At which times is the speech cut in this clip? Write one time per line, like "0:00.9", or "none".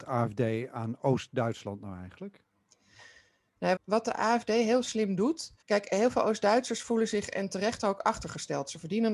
0:03.8
0:05.6